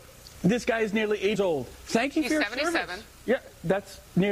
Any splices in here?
yes; 1 cut; at 1.4 s

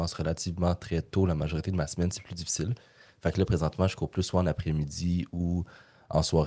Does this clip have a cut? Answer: no; 0 cuts

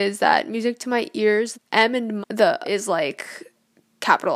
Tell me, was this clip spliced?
yes; 3 cuts; at 1.5 s, 2.2 s, 2.6 s

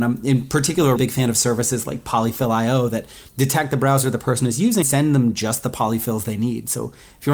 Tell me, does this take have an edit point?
yes; 3 cuts; at 1.0 s, 3.3 s, 4.8 s

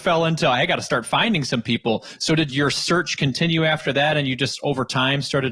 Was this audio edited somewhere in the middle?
no; 0 cuts

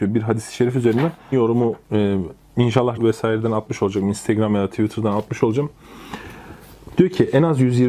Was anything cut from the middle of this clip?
yes; 2 cuts; at 1.3 s, 3.0 s

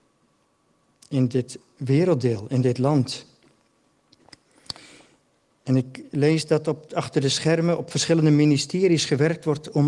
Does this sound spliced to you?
no; 0 cuts

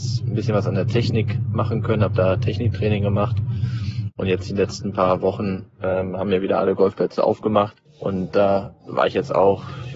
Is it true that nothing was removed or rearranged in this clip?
no; 2 cuts; at 7.9 s, 8.8 s

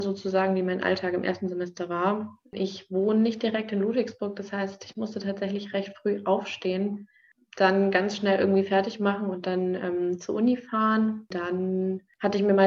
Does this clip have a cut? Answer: no; 0 cuts

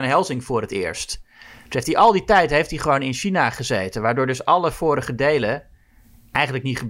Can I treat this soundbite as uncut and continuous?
yes; 0 cuts

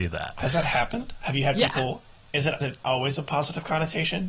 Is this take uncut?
no; 1 cut; at 2.6 s

